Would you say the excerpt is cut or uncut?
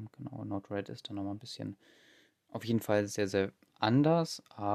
uncut